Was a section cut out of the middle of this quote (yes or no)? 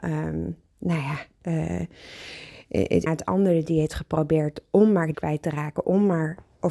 yes